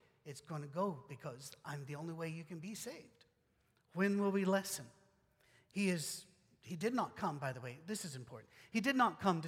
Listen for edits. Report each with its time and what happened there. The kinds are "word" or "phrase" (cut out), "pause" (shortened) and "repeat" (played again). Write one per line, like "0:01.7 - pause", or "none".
none